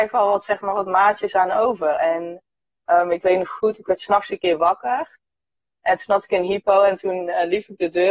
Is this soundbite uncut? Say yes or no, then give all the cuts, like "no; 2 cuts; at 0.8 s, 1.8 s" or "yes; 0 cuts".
yes; 0 cuts